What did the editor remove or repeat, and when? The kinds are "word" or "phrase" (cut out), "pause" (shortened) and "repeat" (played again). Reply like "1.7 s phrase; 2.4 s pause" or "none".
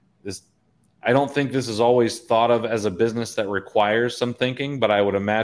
none